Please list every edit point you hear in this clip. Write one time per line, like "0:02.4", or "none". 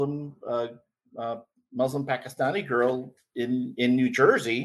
none